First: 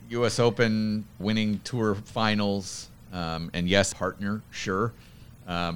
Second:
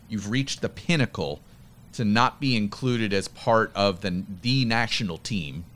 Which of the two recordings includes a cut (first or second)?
first